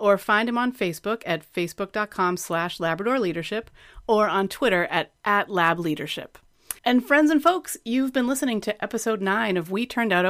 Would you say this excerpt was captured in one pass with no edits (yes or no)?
no